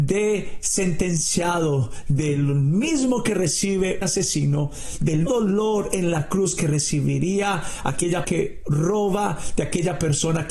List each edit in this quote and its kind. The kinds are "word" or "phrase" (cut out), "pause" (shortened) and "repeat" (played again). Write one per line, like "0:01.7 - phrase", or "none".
0:04.0 - word
0:05.3 - word
0:08.2 - word